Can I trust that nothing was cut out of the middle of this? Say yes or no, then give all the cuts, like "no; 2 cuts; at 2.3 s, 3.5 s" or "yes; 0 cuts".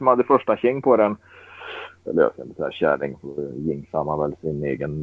yes; 0 cuts